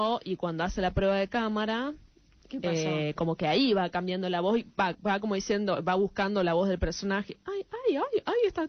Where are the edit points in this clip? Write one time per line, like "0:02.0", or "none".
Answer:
none